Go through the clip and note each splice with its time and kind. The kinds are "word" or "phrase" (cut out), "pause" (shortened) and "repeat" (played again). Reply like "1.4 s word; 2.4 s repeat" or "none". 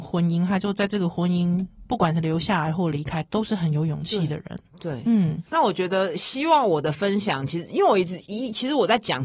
5.5 s pause